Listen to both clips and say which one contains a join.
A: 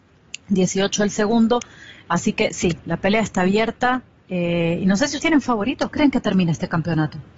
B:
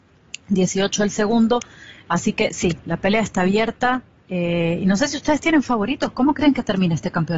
A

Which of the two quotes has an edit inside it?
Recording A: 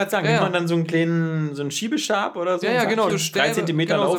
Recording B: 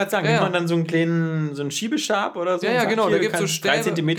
A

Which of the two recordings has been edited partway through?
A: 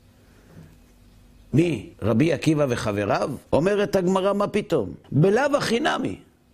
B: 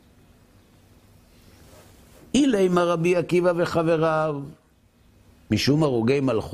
A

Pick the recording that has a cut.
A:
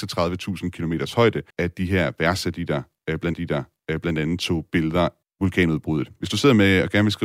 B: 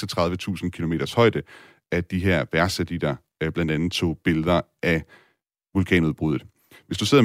A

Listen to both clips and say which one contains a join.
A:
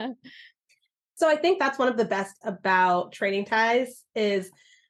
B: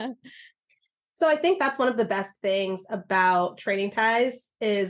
A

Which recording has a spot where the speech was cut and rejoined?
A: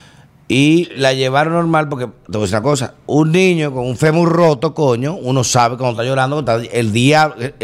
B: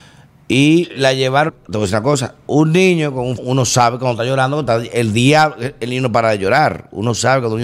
B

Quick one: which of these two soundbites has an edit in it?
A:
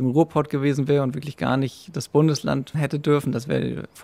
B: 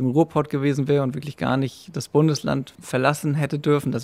A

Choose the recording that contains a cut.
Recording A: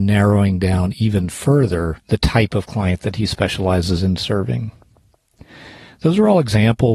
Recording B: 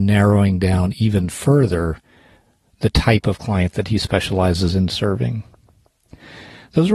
A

